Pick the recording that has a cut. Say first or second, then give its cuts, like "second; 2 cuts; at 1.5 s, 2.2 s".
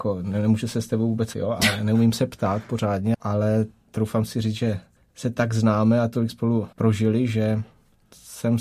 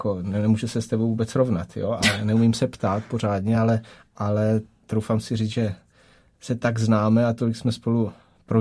first; 5 cuts; at 1.3 s, 3.1 s, 5.0 s, 6.3 s, 6.7 s